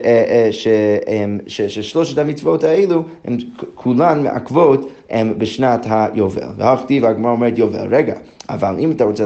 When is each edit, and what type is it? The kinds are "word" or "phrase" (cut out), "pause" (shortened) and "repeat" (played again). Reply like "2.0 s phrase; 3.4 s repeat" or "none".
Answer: none